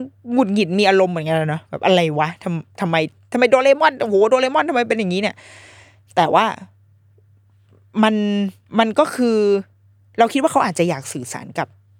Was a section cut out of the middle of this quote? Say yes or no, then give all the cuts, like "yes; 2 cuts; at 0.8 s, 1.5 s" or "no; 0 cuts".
yes; 1 cut; at 8.7 s